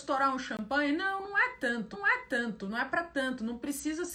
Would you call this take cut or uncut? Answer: cut